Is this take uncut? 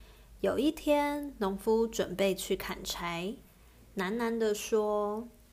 yes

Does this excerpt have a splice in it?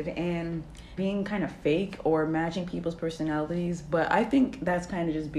yes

